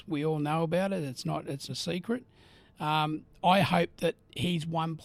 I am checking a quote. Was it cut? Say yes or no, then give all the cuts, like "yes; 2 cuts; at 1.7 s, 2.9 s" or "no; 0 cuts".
yes; 1 cut; at 1.7 s